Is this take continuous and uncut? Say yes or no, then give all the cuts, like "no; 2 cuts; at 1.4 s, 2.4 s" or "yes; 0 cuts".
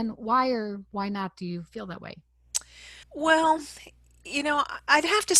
no; 1 cut; at 3.0 s